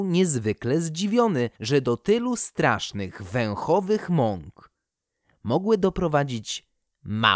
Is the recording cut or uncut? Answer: cut